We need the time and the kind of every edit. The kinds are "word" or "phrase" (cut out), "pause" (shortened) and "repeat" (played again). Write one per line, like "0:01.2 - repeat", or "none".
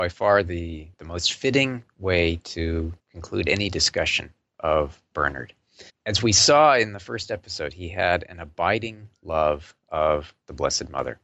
0:00.9 - word
0:03.0 - pause
0:05.9 - pause